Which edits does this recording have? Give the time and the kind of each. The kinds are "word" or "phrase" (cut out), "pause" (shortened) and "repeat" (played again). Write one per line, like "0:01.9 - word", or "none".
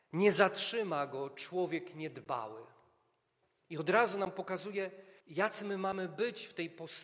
0:05.2 - pause

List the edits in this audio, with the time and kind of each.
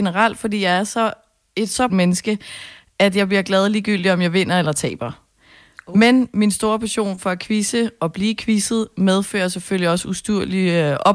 0:01.9 - word

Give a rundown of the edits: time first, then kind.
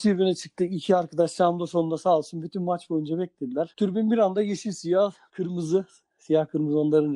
none

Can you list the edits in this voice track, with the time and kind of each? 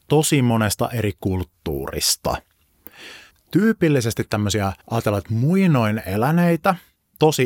0:04.8 - pause

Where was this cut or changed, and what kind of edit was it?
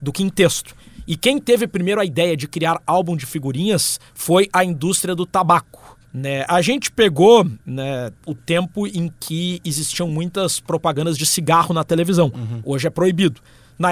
0:04.1 - pause
0:06.0 - pause
0:08.2 - pause

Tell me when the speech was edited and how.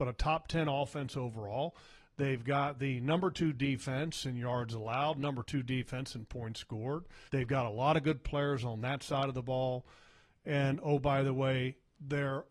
0:07.3 - pause

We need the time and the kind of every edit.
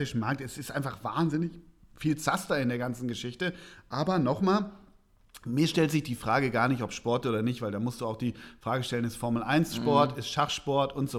none

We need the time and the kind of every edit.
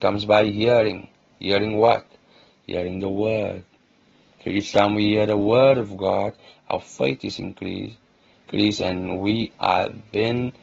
none

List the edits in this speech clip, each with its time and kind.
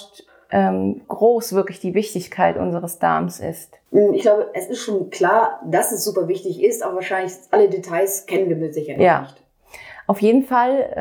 0:01.0 - word
0:03.9 - pause

